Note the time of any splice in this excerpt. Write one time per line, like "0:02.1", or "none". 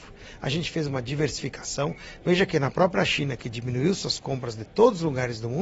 none

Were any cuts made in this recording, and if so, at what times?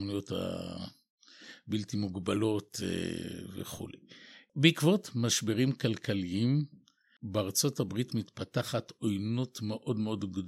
none

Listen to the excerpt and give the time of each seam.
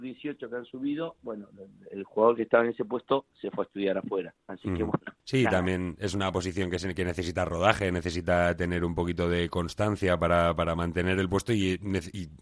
0:05.2

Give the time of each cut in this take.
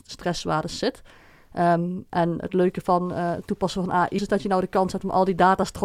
0:04.2

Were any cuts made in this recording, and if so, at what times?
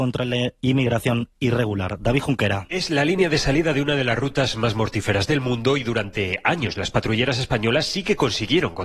none

